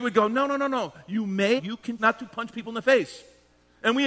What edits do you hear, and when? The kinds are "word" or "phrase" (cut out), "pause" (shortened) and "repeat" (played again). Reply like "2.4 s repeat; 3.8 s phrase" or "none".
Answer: 1.6 s phrase; 2.0 s word